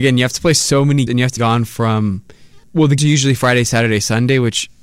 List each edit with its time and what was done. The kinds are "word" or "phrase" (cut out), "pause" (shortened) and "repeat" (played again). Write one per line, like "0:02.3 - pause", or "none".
0:01.1 - word
0:01.4 - word
0:02.6 - pause
0:03.0 - word